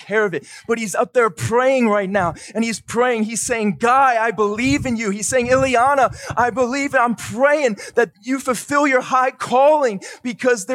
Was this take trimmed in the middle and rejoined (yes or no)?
no